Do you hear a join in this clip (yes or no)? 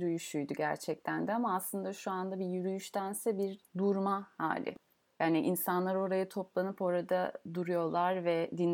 no